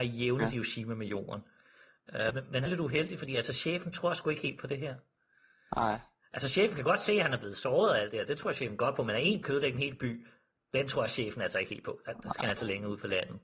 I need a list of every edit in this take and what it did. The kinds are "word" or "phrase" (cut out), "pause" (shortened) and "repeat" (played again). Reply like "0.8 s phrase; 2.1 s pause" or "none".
2.3 s word; 2.7 s word; 9.4 s word